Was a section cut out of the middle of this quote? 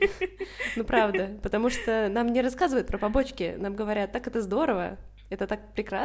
no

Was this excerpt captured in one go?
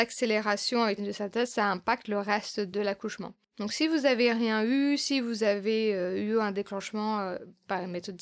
no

